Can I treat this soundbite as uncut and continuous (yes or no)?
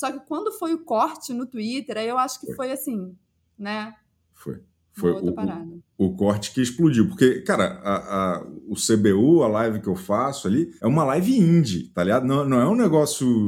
no